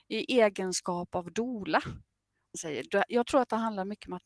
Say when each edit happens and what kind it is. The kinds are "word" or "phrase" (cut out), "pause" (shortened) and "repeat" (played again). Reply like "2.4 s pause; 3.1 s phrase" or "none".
2.5 s word

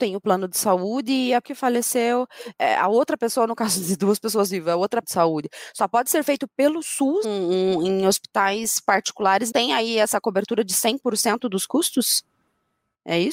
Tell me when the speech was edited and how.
1.4 s word; 5.0 s phrase; 7.2 s word; 9.5 s word

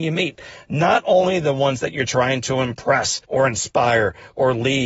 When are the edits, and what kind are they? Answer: 3.2 s pause

